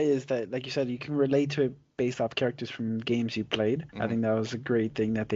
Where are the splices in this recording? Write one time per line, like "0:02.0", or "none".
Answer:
0:03.9